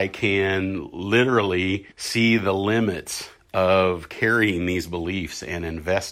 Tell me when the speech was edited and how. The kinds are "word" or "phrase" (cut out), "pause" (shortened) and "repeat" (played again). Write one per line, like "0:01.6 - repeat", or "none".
0:01.9 - pause